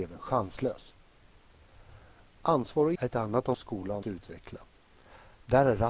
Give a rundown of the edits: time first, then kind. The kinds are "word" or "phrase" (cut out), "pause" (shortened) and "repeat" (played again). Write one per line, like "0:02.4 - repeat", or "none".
0:02.9 - word
0:03.5 - word
0:04.0 - word